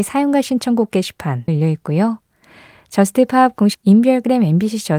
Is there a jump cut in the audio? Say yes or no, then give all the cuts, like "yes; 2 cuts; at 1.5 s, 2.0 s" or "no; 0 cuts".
yes; 2 cuts; at 1.5 s, 3.7 s